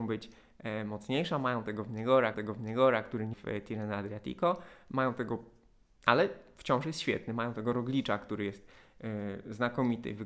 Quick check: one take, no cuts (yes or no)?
no